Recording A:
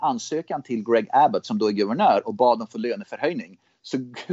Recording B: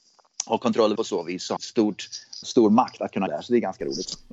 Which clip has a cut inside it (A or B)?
B